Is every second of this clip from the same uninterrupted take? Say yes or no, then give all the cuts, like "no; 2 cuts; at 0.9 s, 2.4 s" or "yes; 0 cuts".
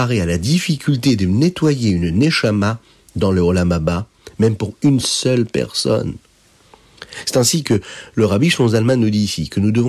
yes; 0 cuts